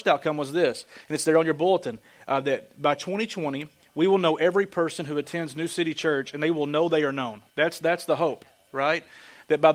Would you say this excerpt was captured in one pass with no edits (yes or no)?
no